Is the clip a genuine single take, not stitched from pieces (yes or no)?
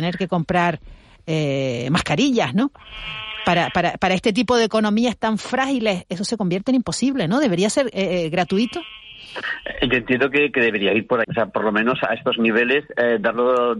no